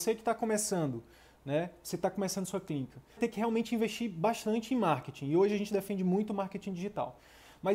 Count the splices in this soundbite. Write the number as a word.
one